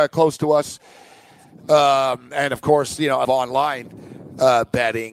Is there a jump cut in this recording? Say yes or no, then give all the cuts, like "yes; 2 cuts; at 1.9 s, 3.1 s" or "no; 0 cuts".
yes; 1 cut; at 3.2 s